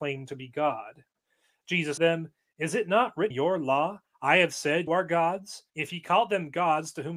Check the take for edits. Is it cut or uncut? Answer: cut